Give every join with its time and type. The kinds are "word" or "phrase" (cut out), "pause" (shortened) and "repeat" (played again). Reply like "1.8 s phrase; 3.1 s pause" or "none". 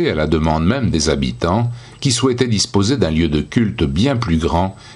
none